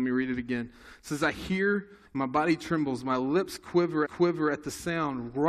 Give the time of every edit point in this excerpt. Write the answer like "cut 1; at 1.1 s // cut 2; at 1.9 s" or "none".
cut 1; at 2.0 s // cut 2; at 4.0 s

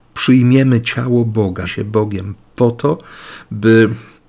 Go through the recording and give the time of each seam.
cut 1; at 1.7 s

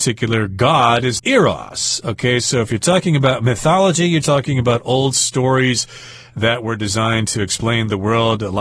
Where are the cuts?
cut 1; at 1.2 s // cut 2; at 4.2 s

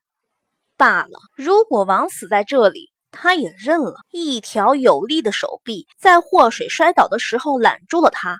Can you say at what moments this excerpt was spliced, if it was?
cut 1; at 1.3 s // cut 2; at 4.0 s // cut 3; at 5.9 s

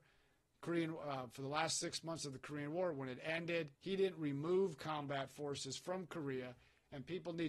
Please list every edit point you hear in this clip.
cut 1; at 3.7 s

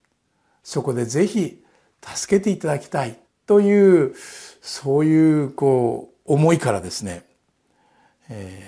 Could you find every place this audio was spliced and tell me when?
cut 1; at 3.3 s

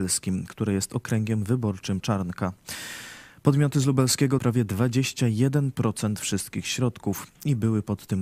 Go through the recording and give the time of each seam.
cut 1; at 2.0 s // cut 2; at 4.4 s

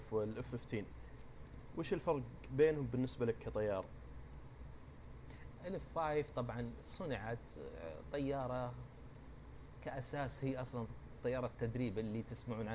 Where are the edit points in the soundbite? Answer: none

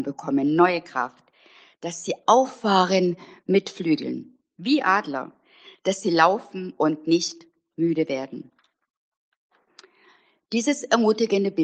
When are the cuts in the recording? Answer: none

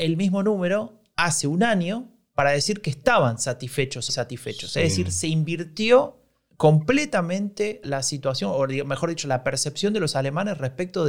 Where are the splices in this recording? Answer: cut 1; at 4.1 s // cut 2; at 6.5 s // cut 3; at 7.8 s

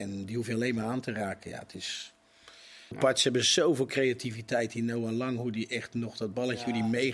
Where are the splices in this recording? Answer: cut 1; at 2.9 s

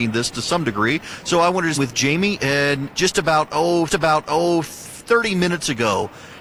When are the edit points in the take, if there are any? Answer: cut 1; at 1.8 s // cut 2; at 2.9 s // cut 3; at 3.9 s

